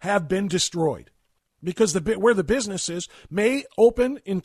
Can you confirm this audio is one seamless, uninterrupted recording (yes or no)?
yes